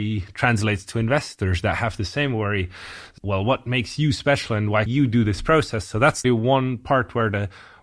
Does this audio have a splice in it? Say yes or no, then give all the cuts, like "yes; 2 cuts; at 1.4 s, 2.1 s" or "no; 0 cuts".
yes; 3 cuts; at 3.2 s, 4.9 s, 6.2 s